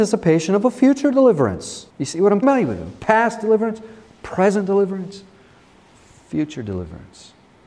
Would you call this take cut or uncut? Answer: cut